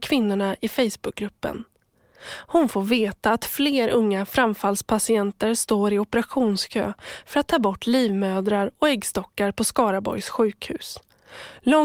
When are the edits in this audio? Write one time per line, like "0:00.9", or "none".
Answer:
none